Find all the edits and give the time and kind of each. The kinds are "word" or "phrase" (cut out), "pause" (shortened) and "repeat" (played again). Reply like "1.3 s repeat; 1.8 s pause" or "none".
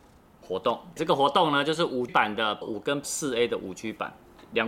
1.0 s word; 2.1 s word; 2.6 s word; 3.0 s word